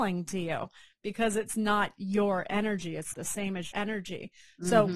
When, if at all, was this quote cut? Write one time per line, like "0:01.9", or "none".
0:03.1
0:03.7